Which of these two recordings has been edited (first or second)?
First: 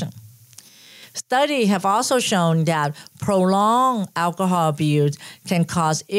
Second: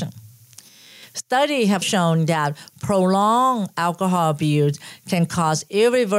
second